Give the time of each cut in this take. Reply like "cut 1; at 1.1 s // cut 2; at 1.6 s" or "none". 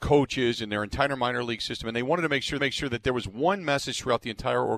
cut 1; at 2.6 s